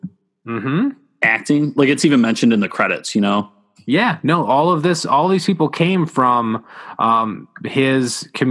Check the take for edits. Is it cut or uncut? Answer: uncut